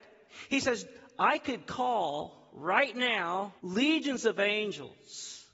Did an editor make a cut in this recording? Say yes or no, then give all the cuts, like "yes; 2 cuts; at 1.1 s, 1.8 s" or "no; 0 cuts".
yes; 1 cut; at 3.6 s